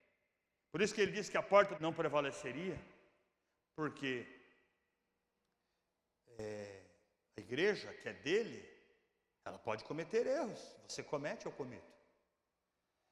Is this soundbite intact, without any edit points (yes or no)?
no